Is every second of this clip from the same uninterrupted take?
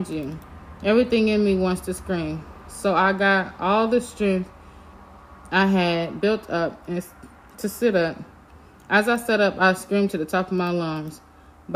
yes; 0 cuts

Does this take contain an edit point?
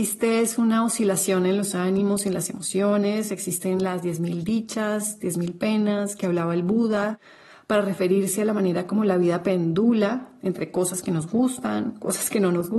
no; 0 cuts

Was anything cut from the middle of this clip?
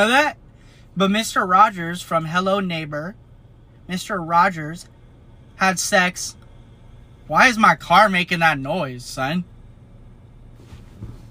no; 0 cuts

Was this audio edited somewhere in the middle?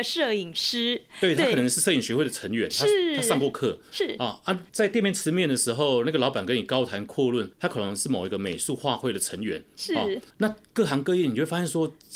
yes; 3 cuts; at 4.7 s, 7.5 s, 10.3 s

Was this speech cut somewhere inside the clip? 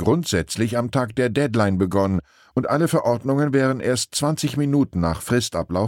no; 0 cuts

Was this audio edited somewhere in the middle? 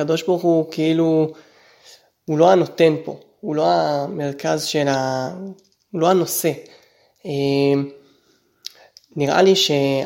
no; 0 cuts

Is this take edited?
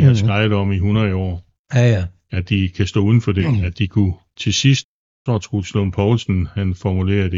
no; 0 cuts

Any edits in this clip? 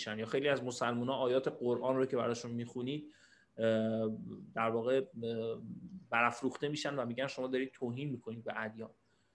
no; 0 cuts

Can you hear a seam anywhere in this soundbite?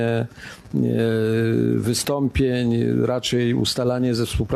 no; 0 cuts

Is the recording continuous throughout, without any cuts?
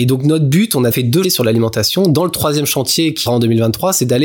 no; 3 cuts; at 0.9 s, 1.2 s, 3.3 s

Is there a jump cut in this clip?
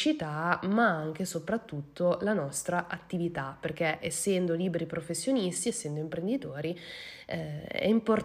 no; 0 cuts

